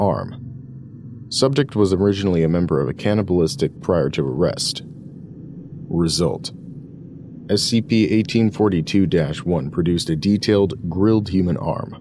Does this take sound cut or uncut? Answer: cut